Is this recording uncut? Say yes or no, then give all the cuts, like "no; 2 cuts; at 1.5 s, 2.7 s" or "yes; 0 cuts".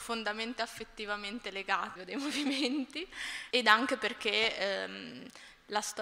no; 2 cuts; at 2.0 s, 3.5 s